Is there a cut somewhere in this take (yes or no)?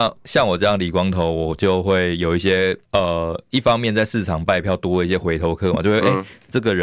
yes